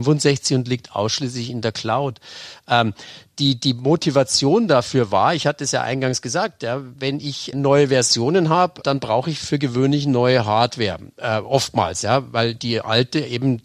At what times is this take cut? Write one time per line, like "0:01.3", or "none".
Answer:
0:07.5
0:08.8